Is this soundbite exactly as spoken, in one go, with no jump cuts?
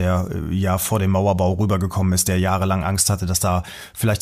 yes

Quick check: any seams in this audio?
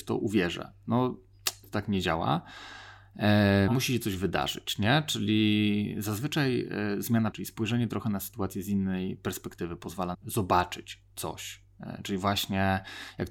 yes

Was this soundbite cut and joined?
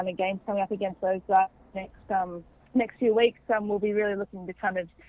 yes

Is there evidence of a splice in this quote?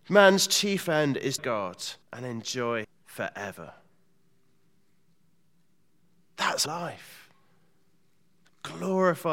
yes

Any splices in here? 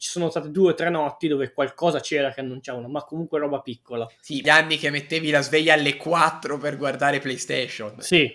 yes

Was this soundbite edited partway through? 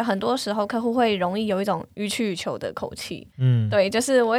yes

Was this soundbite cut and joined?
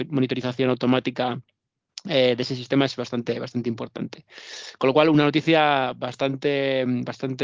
no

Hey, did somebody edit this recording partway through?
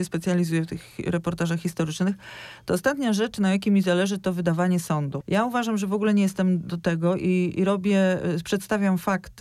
no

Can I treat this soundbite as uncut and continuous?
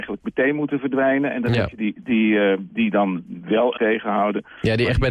no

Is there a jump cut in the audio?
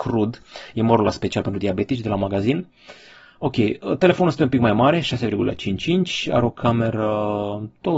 no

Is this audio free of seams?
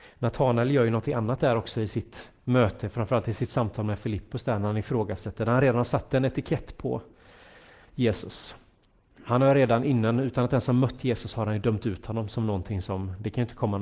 yes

